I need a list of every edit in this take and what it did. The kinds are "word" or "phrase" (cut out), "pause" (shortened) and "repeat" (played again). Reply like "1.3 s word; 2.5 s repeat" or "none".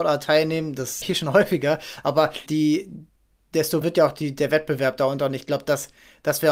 1.0 s word; 2.5 s word; 3.8 s word